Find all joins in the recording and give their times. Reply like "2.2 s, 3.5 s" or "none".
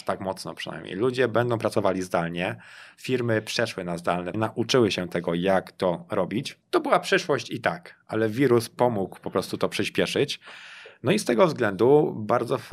4.3 s, 6.6 s